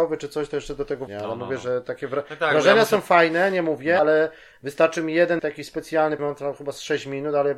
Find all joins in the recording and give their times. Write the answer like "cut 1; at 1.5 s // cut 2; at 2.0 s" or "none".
cut 1; at 1.1 s // cut 2; at 4.0 s // cut 3; at 5.4 s // cut 4; at 6.2 s